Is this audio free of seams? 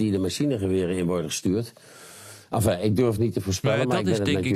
no; 1 cut; at 3.2 s

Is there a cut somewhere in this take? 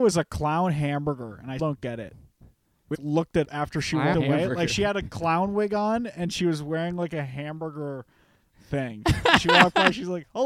yes; 4 cuts; at 1.6 s, 2.9 s, 3.4 s, 4.1 s

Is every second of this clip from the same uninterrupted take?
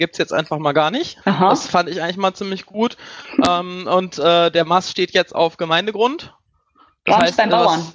no; 1 cut; at 1.2 s

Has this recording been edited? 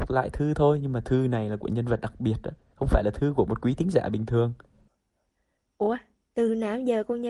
no; 0 cuts

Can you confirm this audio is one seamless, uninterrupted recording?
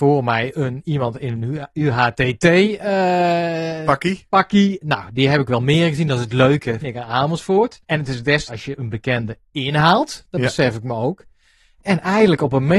no; 3 cuts; at 6.8 s, 7.8 s, 8.5 s

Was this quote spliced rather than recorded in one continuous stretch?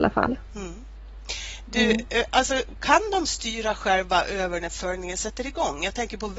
no; 0 cuts

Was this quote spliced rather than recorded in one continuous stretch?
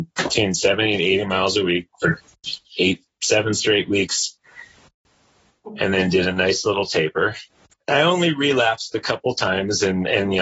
no; 0 cuts

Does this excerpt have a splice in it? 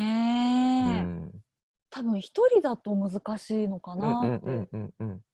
yes; 1 cut; at 1.7 s

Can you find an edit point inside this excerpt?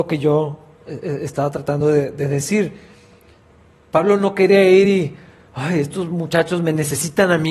no; 0 cuts

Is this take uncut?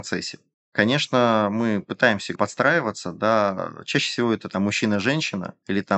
yes; 0 cuts

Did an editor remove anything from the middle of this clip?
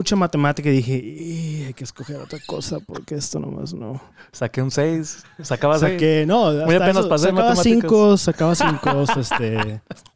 no; 0 cuts

